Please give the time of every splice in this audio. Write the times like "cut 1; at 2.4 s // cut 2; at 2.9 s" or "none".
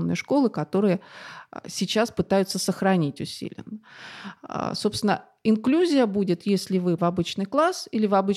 cut 1; at 7.0 s